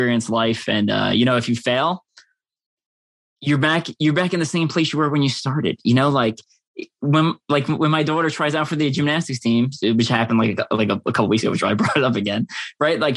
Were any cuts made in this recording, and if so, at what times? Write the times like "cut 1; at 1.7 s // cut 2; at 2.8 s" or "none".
none